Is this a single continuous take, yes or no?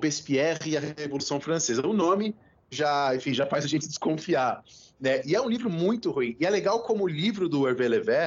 yes